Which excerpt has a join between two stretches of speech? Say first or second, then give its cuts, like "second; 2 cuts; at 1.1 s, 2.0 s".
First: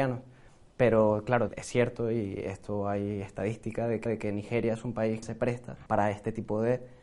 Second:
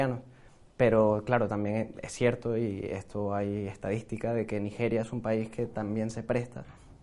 first; 4 cuts; at 1.5 s, 4.1 s, 5.2 s, 5.9 s